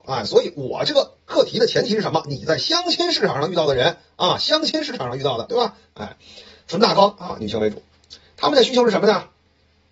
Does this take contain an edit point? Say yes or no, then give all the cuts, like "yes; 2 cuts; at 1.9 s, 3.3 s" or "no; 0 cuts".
no; 0 cuts